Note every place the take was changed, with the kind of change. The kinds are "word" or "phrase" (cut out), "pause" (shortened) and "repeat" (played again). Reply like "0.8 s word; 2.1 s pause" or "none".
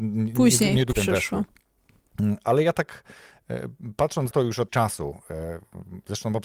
0.9 s word; 4.3 s word; 4.7 s word